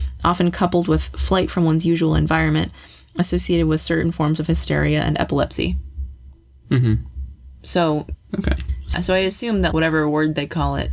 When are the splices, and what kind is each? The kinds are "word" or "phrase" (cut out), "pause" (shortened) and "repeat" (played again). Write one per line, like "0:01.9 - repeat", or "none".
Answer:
0:08.9 - word
0:09.7 - word